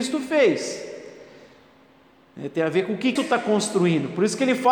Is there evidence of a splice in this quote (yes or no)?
yes